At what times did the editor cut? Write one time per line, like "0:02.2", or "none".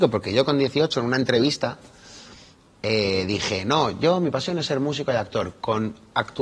none